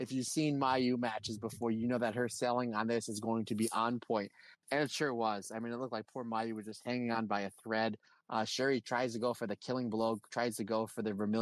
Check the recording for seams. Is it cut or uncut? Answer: uncut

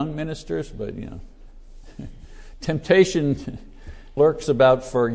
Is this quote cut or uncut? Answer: cut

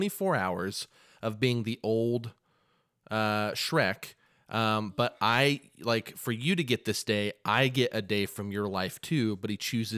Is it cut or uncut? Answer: uncut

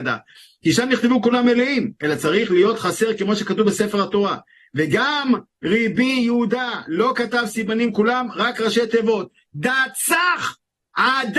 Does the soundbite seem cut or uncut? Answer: uncut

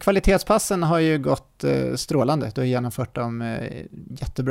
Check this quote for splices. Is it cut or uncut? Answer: uncut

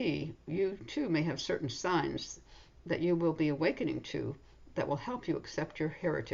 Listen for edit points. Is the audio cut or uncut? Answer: uncut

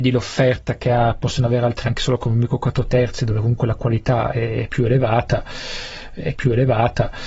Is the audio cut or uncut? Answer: cut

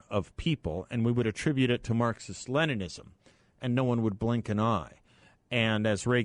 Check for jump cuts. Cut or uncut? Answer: uncut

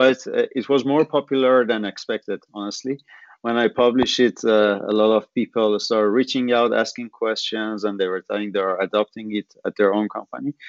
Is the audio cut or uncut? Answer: uncut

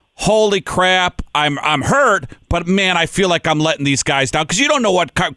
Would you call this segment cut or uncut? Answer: uncut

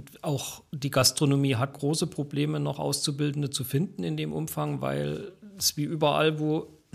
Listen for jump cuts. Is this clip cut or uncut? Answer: cut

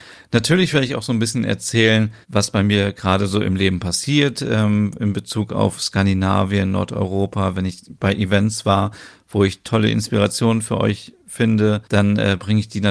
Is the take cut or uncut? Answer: cut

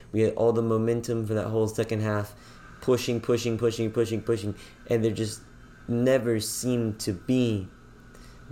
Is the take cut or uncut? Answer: uncut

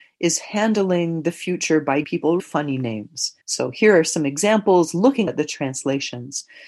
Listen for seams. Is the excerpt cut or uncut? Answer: cut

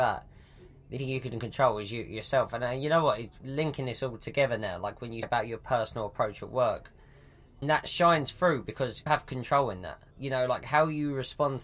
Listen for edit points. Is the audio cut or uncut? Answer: cut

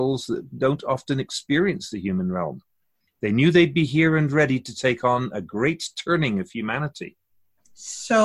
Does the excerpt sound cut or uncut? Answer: uncut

